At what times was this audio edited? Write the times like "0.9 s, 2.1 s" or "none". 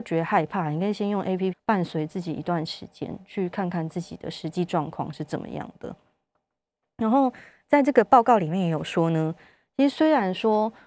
1.5 s